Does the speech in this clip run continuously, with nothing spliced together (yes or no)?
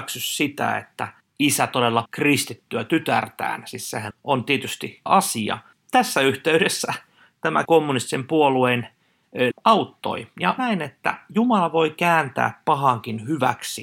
no